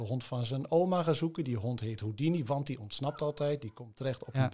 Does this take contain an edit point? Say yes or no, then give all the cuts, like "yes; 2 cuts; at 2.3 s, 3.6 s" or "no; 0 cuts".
no; 0 cuts